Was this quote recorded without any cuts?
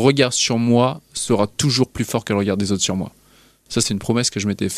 yes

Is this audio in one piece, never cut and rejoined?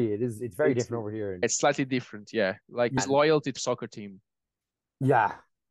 no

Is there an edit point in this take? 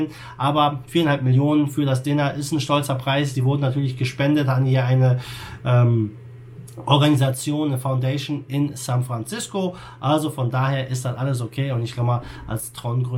no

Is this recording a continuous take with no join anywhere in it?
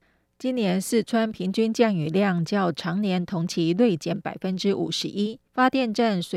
no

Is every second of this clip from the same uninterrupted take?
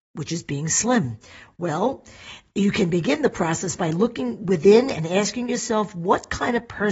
yes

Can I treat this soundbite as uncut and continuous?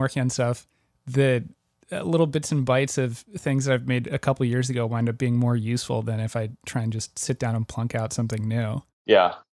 yes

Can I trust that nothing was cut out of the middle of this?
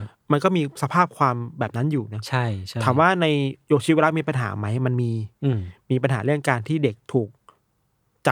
yes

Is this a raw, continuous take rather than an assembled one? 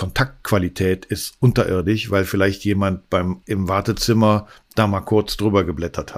no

